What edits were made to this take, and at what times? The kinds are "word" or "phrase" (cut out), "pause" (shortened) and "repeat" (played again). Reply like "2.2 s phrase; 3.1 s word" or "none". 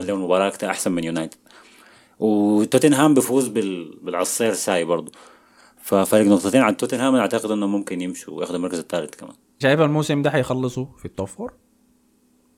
9.6 s word